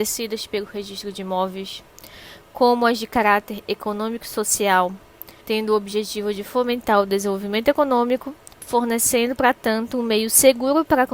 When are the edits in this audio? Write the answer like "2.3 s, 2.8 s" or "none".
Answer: 5.4 s, 8.5 s